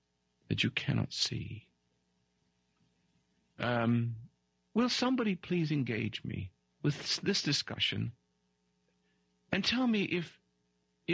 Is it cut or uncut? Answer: uncut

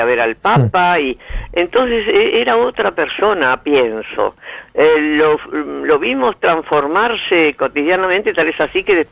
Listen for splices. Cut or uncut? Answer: uncut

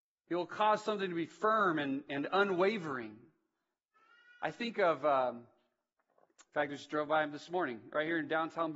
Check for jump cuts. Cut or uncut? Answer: uncut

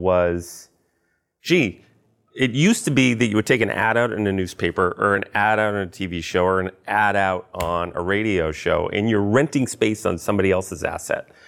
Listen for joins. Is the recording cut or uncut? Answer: uncut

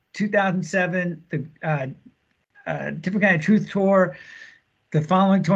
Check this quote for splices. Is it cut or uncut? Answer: uncut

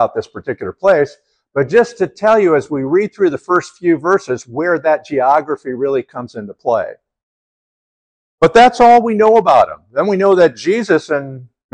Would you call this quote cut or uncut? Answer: uncut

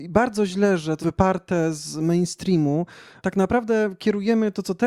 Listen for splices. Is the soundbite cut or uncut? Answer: cut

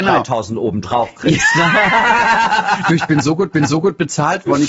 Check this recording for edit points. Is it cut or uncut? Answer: cut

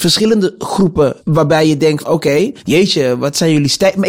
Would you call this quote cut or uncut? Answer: cut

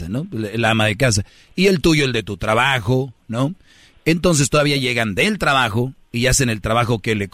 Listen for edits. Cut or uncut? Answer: uncut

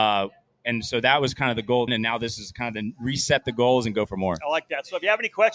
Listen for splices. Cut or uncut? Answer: cut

